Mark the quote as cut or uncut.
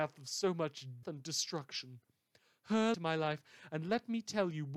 cut